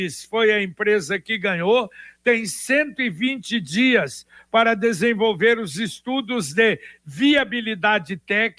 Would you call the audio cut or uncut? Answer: uncut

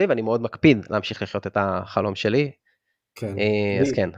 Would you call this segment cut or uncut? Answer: uncut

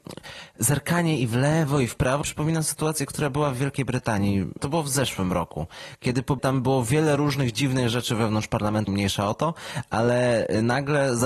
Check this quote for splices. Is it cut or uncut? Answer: cut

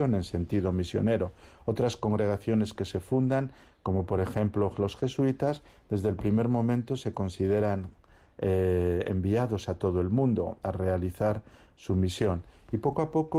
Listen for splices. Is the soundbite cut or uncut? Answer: uncut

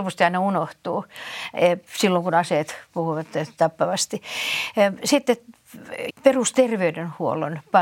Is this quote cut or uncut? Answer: cut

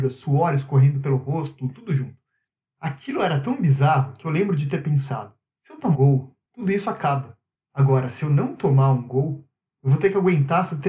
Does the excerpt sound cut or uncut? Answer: cut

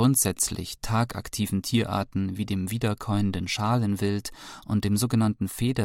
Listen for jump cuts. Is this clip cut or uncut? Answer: uncut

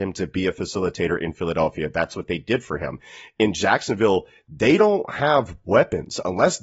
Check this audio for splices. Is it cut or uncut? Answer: uncut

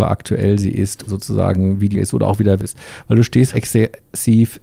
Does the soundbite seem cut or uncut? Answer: cut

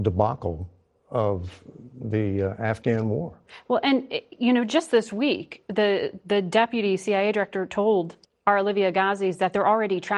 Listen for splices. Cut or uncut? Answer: cut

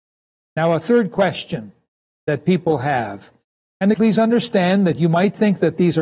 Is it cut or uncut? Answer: cut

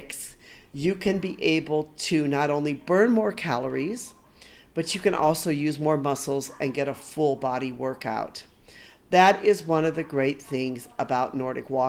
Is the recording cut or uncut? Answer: uncut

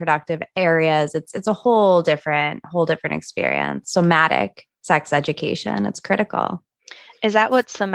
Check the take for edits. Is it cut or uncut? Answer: uncut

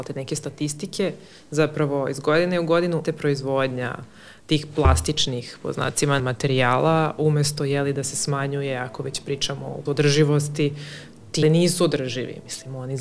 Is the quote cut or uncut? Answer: cut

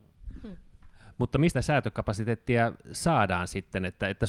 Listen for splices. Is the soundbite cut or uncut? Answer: cut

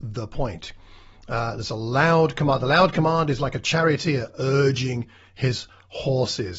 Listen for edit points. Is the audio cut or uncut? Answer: uncut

